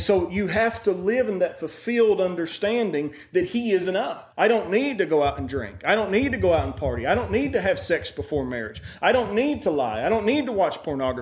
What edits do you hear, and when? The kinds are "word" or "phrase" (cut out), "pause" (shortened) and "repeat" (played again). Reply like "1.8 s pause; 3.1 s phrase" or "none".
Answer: 4.3 s pause